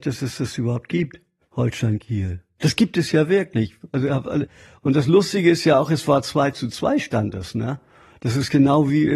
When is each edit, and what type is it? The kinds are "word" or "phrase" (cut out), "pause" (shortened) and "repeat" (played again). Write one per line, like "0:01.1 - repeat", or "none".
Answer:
none